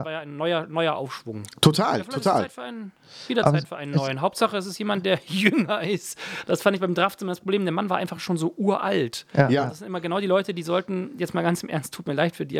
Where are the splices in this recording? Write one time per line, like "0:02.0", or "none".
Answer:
none

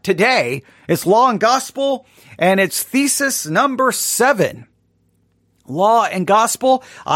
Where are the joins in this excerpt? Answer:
none

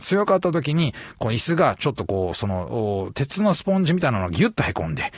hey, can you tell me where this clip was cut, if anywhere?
none

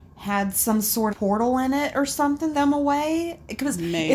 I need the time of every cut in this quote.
0:01.1
0:02.5

